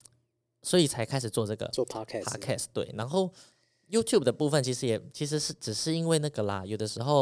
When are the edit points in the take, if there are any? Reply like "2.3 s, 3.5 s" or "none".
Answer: none